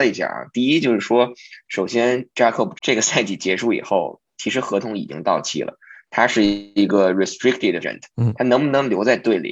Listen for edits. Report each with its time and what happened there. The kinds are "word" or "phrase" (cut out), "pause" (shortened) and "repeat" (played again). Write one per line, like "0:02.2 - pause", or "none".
0:02.7 - word
0:07.8 - word

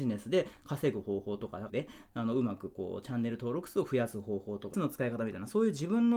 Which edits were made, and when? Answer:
0:01.7 - word
0:04.7 - word

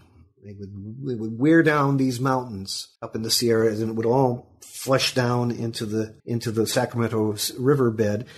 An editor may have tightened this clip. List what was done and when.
0:03.0 - pause
0:06.2 - pause

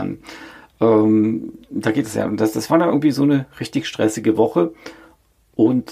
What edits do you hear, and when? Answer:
none

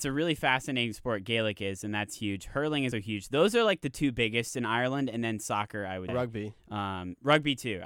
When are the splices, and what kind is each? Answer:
0:02.9 - word
0:06.1 - word

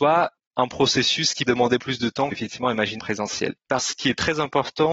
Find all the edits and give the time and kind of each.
0:01.5 - word
0:01.8 - word
0:02.3 - word
0:03.0 - phrase
0:03.8 - word

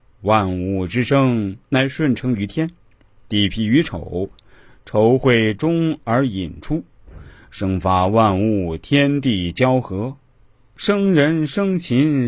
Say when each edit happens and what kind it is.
none

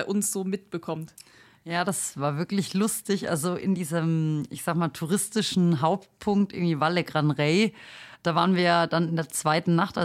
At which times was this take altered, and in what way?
none

